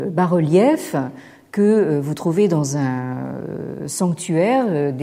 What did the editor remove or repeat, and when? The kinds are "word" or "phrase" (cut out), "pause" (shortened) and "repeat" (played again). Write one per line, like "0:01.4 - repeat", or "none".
none